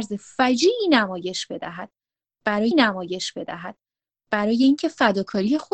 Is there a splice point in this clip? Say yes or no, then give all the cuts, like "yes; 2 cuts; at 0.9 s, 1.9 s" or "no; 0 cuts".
yes; 1 cut; at 2.7 s